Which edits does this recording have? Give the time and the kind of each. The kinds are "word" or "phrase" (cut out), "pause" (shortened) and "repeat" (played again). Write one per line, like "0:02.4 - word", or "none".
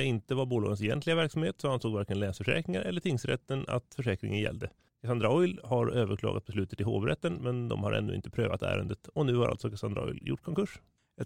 none